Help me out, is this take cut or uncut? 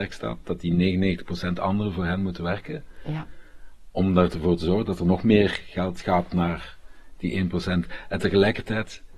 uncut